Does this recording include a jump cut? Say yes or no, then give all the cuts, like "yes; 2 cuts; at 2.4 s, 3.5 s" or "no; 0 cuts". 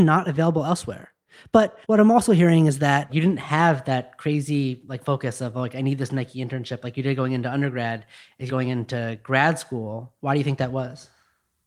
yes; 5 cuts; at 1.8 s, 3.1 s, 5.0 s, 8.5 s, 10.2 s